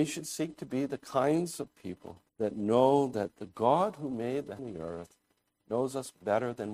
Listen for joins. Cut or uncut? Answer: cut